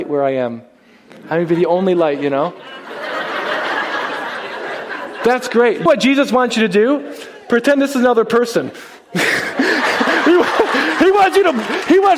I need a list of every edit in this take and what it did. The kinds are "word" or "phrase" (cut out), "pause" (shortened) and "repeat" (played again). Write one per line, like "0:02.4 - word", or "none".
0:05.9 - word